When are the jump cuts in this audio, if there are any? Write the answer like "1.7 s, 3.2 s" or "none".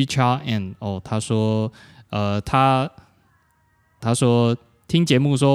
4.0 s